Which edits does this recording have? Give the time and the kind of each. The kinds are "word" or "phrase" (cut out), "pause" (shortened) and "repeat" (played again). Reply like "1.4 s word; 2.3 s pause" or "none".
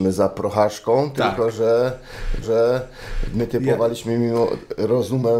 2.4 s repeat